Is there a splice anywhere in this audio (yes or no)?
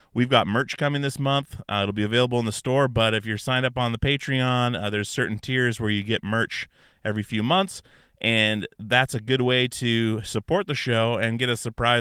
no